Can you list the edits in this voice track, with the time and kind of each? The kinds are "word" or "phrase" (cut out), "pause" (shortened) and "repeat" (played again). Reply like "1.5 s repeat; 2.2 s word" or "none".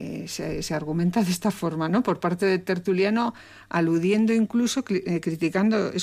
none